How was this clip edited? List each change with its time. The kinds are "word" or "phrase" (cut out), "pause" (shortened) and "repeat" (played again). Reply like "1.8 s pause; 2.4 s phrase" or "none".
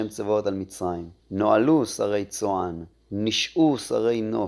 1.2 s pause; 2.9 s pause